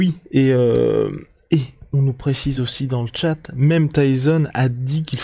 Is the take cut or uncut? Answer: uncut